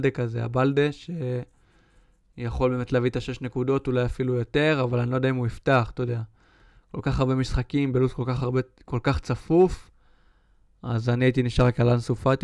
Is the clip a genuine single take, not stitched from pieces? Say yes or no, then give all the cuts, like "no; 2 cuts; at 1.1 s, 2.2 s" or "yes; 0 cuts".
yes; 0 cuts